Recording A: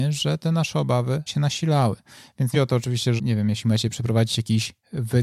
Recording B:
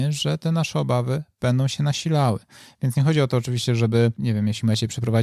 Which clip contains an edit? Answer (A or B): A